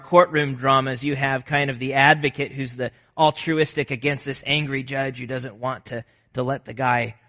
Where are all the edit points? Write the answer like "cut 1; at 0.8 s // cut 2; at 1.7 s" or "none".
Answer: none